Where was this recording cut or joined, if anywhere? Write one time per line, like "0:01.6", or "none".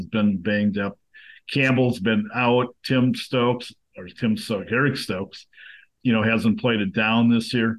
none